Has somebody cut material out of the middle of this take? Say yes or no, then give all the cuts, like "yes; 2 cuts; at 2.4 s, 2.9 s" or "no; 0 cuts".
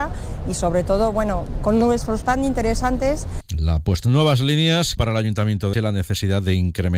yes; 6 cuts; at 1.6 s, 2.2 s, 3.5 s, 4.0 s, 5.0 s, 5.7 s